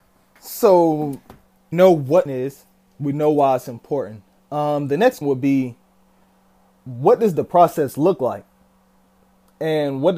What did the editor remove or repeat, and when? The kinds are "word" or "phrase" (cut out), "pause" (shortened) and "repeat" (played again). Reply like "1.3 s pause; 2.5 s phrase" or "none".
1.7 s word; 2.3 s word; 5.2 s word